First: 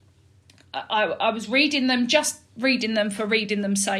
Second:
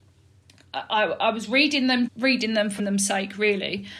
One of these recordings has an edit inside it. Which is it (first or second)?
second